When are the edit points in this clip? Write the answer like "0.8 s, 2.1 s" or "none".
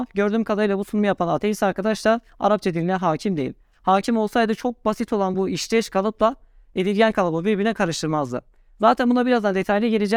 none